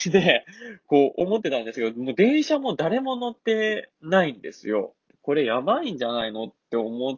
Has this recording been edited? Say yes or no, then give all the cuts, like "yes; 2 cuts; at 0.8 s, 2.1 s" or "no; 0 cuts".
no; 0 cuts